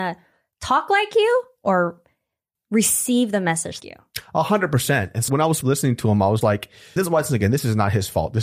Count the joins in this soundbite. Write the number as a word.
six